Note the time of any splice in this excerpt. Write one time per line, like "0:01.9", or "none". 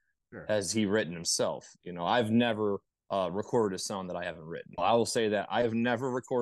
0:02.9
0:04.8